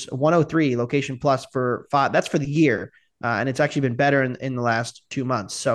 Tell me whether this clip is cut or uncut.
uncut